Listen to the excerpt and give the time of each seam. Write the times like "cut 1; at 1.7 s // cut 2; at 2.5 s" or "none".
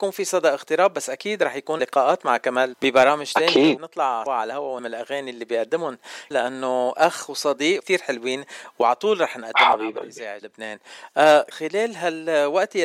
cut 1; at 1.8 s // cut 2; at 2.7 s // cut 3; at 3.8 s // cut 4; at 4.3 s // cut 5; at 4.8 s // cut 6; at 6.3 s // cut 7; at 7.8 s // cut 8; at 10.4 s // cut 9; at 11.5 s